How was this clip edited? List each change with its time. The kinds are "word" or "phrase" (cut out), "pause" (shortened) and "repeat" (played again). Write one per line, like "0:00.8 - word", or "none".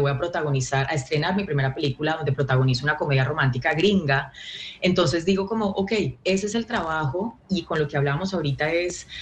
none